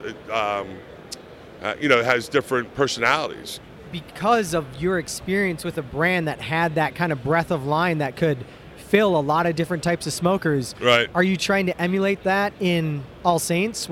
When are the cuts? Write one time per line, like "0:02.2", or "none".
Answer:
none